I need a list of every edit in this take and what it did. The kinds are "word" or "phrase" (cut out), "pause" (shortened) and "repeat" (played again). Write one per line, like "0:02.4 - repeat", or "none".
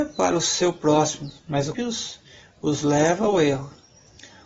0:01.4 - pause
0:01.7 - word